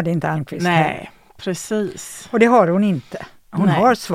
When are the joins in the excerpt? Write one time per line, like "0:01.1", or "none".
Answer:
none